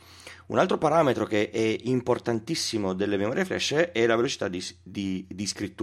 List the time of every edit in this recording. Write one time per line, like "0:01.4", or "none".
none